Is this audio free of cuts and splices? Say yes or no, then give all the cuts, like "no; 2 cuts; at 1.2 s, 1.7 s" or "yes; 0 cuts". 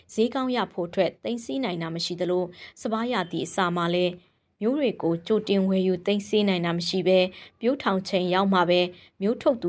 yes; 0 cuts